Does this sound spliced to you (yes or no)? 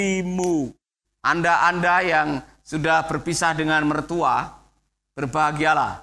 no